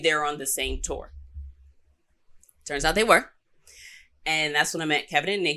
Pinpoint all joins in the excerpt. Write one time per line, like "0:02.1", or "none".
none